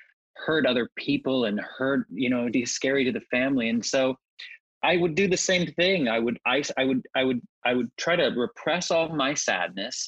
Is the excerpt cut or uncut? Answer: cut